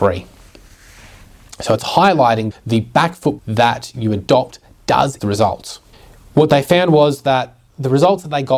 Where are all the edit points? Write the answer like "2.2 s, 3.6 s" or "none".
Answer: 2.5 s, 3.4 s, 5.2 s, 5.9 s